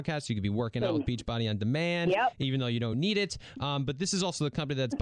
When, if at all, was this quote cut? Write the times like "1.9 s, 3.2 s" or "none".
none